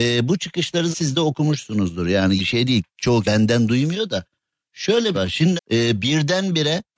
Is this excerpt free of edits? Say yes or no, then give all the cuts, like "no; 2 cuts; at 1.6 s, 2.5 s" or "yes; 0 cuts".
no; 5 cuts; at 0.9 s, 2.4 s, 3.2 s, 5.1 s, 5.6 s